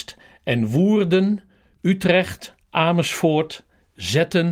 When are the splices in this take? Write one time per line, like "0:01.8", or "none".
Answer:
0:02.6